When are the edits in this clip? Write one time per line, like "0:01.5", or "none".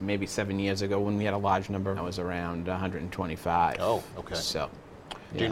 0:02.0